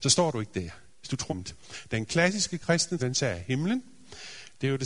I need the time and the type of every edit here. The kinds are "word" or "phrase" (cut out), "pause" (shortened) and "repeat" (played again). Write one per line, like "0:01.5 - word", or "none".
0:01.3 - word
0:03.0 - word